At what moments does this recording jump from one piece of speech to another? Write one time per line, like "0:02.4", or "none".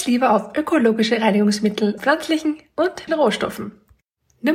0:02.0
0:03.1